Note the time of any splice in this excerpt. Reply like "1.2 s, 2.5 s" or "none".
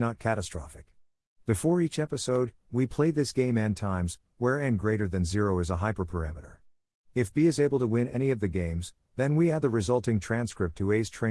none